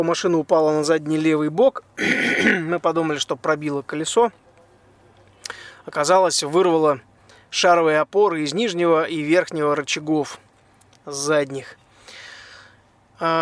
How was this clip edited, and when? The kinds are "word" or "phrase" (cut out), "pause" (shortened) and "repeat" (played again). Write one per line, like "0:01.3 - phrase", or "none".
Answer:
none